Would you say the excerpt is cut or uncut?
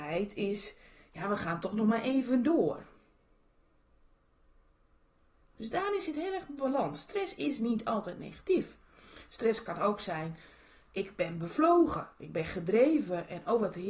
uncut